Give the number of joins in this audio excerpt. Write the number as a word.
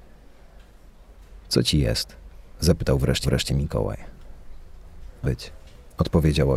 two